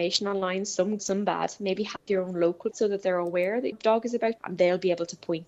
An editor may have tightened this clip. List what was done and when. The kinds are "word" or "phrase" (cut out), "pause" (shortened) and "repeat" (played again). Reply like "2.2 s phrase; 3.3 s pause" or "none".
1.0 s word; 2.0 s pause; 2.7 s word; 3.7 s word; 4.4 s phrase